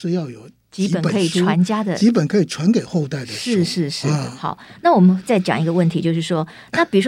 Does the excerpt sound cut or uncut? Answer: uncut